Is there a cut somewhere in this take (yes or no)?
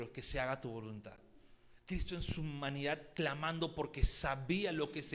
no